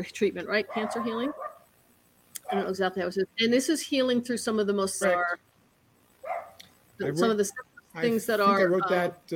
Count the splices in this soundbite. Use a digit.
1